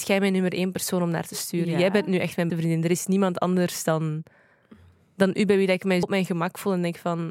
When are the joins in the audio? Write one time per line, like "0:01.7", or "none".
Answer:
0:02.5
0:06.0